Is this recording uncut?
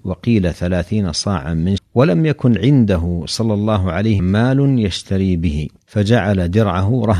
no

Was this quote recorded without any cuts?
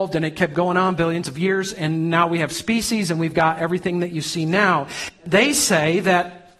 yes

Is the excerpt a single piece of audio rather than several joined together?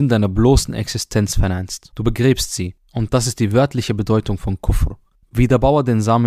yes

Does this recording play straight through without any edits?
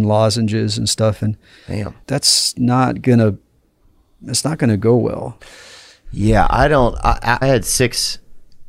no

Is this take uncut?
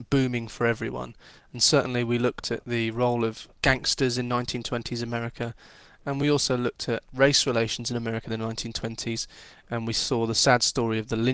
yes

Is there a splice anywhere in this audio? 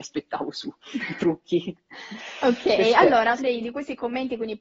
yes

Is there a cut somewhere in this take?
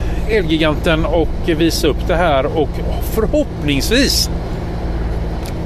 no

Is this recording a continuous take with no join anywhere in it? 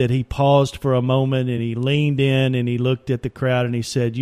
yes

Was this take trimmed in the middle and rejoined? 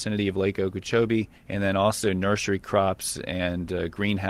yes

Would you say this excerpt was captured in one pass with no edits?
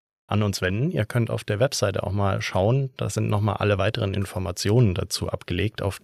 yes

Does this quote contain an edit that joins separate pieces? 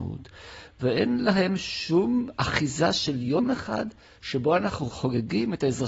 no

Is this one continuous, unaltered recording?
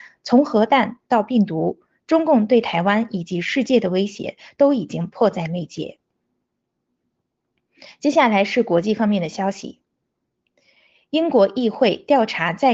yes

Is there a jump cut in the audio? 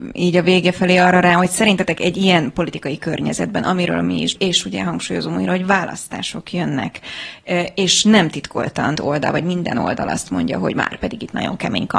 yes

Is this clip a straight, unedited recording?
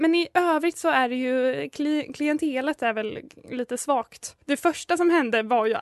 no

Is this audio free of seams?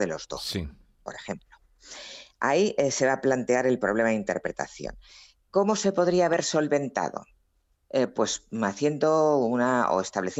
yes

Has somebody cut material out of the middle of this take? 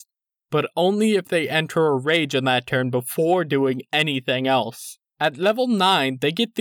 yes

